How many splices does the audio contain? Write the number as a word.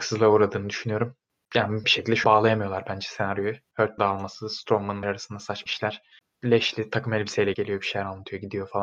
six